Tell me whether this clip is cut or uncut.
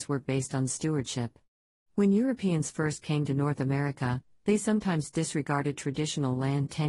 uncut